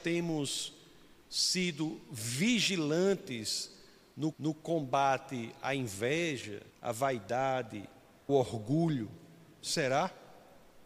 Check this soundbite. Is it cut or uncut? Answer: cut